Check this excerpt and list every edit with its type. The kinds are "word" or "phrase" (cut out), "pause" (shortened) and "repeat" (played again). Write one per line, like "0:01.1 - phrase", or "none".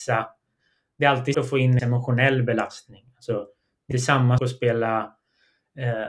0:01.3 - word
0:01.8 - word
0:03.9 - word
0:04.4 - word